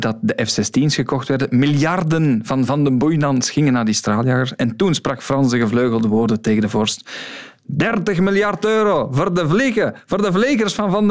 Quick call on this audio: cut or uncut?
uncut